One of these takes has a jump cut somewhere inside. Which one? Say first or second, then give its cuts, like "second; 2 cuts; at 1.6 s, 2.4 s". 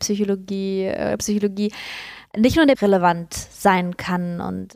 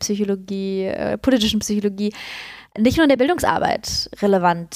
first; 2 cuts; at 1.2 s, 2.7 s